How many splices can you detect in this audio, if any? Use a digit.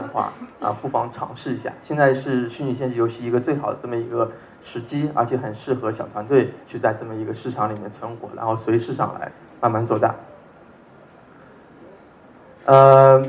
1